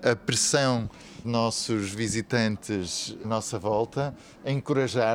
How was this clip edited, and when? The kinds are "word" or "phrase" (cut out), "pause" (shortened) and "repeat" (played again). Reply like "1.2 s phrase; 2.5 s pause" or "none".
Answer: 1.2 s word; 3.2 s word